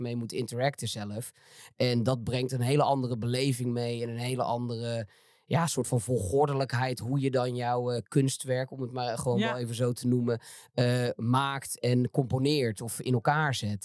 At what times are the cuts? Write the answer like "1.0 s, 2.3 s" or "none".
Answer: none